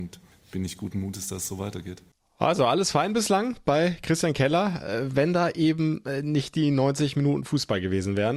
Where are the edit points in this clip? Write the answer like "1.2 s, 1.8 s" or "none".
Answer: none